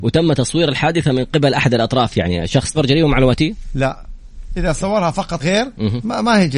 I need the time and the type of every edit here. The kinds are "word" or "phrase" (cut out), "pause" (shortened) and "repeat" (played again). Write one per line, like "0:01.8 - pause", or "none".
0:02.7 - phrase
0:05.4 - word